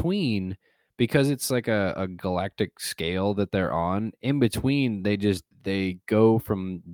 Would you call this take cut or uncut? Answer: cut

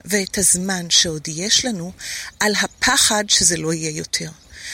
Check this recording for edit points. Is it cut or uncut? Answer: uncut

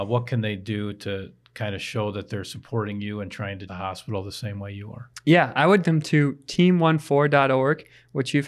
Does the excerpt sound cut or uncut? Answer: cut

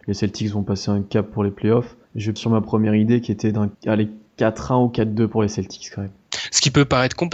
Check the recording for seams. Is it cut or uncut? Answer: cut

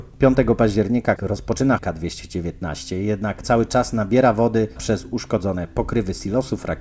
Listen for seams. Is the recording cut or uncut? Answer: cut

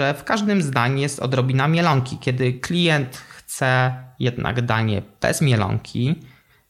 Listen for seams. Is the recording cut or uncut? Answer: uncut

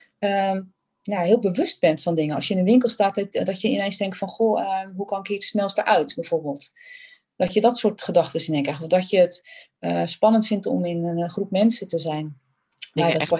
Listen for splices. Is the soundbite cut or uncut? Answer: uncut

